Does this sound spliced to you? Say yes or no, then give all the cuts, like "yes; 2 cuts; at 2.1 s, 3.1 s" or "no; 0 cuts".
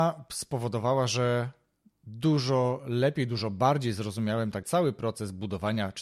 yes; 1 cut; at 4.6 s